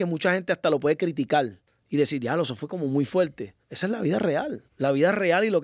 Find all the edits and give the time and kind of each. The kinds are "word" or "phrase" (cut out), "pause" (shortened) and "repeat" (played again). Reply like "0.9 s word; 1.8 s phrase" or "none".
1.7 s pause; 3.6 s pause; 4.7 s pause